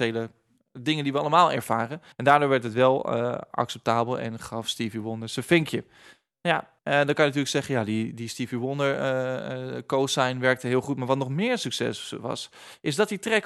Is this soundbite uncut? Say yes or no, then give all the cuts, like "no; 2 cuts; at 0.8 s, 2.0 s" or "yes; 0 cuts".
no; 2 cuts; at 2.1 s, 6.8 s